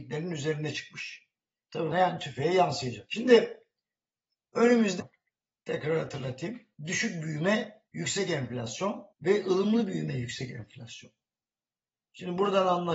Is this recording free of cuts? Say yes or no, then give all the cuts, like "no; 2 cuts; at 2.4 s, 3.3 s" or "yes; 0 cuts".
no; 5 cuts; at 1.9 s, 5.0 s, 6.7 s, 7.9 s, 9.1 s